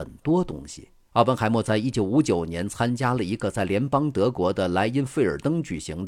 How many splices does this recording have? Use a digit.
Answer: 1